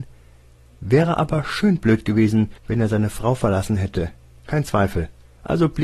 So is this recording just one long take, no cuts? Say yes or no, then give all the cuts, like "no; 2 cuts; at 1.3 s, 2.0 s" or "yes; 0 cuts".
no; 1 cut; at 2.6 s